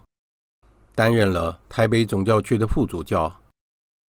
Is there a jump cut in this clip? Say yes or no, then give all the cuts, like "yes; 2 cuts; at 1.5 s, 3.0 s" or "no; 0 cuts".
yes; 1 cut; at 1.6 s